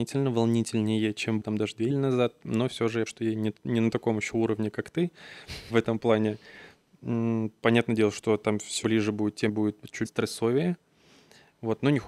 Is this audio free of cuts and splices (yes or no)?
no